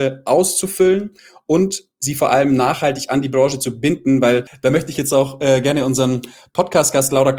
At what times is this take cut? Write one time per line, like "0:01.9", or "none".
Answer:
none